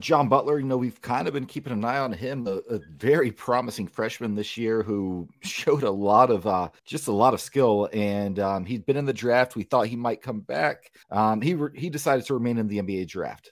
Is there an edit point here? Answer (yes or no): yes